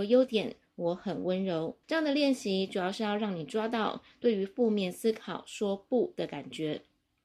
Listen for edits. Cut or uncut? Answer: cut